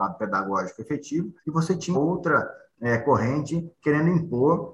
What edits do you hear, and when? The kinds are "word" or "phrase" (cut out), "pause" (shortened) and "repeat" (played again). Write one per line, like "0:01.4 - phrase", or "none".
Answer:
0:01.4 - pause
0:01.9 - word